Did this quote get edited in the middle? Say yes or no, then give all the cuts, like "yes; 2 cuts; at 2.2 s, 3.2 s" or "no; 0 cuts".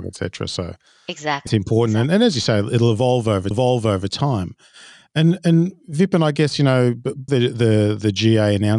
yes; 3 cuts; at 1.5 s, 3.5 s, 7.3 s